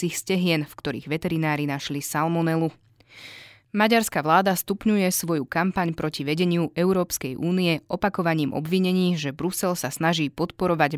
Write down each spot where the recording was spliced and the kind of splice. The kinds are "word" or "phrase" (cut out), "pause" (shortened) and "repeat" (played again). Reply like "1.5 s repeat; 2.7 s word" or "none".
none